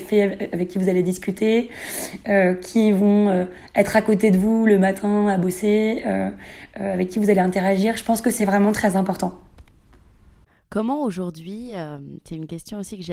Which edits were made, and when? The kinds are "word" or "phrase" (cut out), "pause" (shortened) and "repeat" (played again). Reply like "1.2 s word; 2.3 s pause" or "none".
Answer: none